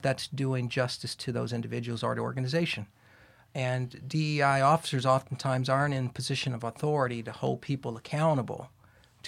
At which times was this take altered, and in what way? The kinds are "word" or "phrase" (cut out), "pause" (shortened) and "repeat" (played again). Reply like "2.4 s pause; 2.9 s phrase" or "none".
none